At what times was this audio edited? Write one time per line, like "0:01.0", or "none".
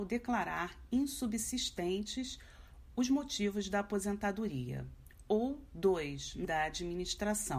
0:06.4